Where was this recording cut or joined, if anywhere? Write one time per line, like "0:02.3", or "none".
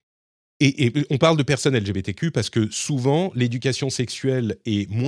none